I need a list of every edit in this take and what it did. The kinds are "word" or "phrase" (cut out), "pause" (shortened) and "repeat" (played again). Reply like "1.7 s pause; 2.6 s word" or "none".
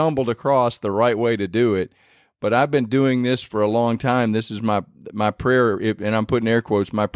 none